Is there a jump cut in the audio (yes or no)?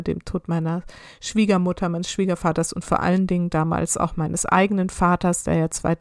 no